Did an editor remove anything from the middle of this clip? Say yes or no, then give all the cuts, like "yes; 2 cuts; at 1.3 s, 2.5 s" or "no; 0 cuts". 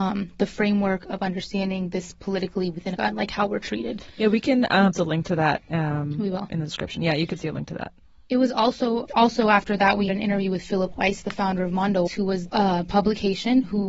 yes; 6 cuts; at 3.0 s, 4.9 s, 9.0 s, 10.1 s, 12.1 s, 12.5 s